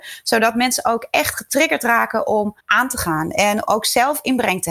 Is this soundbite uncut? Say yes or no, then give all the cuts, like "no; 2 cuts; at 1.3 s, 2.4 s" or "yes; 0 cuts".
no; 2 cuts; at 2.6 s, 3.6 s